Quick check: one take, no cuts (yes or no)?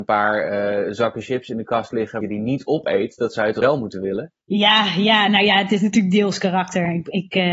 no